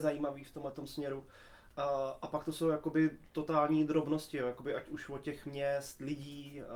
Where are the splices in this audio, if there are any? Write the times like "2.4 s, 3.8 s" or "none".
none